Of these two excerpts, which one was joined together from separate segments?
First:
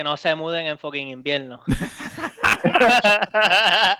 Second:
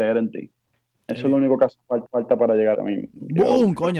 second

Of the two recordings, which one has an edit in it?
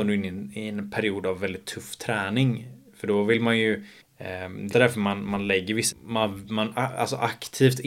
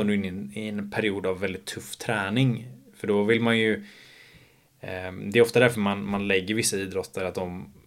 first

